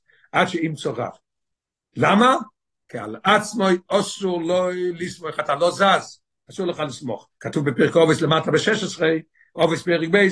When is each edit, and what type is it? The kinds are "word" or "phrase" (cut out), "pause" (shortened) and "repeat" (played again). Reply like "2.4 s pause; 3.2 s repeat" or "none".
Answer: 7.4 s pause